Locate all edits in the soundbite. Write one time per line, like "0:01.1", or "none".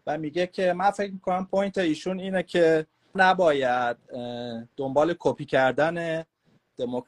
0:03.1
0:04.7